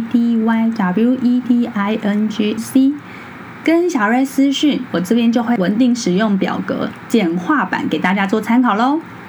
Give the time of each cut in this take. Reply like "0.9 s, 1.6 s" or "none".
1.4 s, 2.6 s